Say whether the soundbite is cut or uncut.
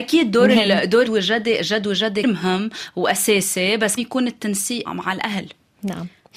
cut